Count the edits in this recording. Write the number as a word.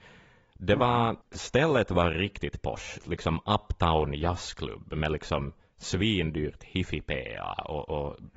two